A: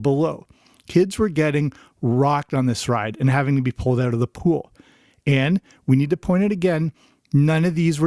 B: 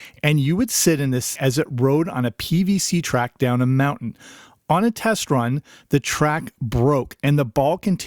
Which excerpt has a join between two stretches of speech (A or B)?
B